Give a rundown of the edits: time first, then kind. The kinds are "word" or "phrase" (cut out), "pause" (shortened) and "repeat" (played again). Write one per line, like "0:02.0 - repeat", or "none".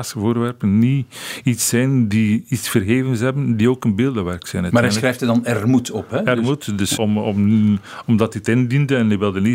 0:07.0 - word